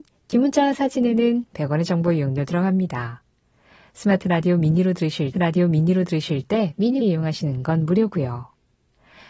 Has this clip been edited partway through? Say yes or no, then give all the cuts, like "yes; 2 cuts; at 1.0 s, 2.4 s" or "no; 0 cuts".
yes; 2 cuts; at 5.3 s, 7.0 s